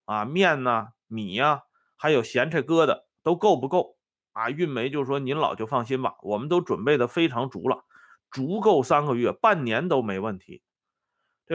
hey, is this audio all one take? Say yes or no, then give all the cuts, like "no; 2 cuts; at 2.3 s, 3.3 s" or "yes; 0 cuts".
yes; 0 cuts